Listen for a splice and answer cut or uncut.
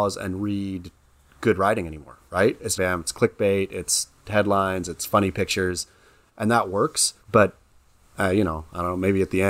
cut